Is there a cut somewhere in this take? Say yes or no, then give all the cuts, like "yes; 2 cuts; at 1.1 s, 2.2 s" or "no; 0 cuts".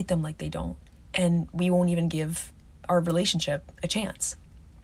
no; 0 cuts